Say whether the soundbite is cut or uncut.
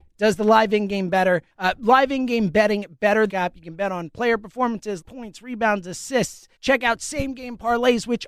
cut